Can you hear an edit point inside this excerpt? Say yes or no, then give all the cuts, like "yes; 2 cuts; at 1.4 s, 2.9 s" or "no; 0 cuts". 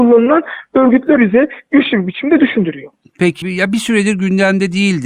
yes; 2 cuts; at 1.2 s, 3.4 s